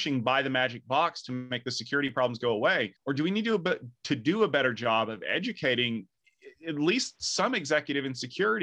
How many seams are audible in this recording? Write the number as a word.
one